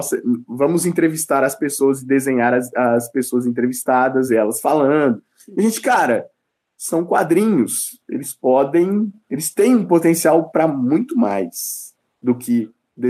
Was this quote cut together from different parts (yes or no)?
no